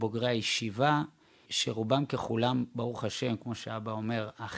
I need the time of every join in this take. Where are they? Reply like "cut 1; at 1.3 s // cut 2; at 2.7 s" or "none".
cut 1; at 1.5 s